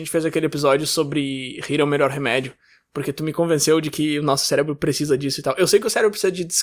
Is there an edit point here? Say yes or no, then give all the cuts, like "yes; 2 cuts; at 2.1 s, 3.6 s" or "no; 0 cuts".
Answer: no; 0 cuts